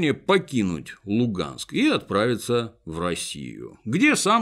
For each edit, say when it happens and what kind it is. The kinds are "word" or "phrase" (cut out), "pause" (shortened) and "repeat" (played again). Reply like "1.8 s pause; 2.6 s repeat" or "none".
none